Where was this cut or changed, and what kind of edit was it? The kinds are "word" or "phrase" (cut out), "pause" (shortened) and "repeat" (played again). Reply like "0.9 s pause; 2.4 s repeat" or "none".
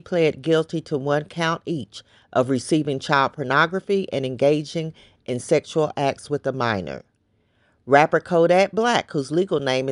none